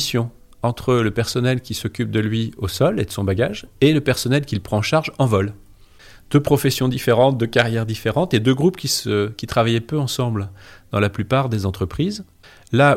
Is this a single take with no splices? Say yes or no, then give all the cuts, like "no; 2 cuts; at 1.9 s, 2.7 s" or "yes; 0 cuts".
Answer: yes; 0 cuts